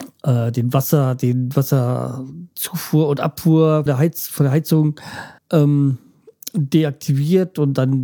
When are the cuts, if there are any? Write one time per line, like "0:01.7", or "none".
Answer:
0:03.9
0:05.4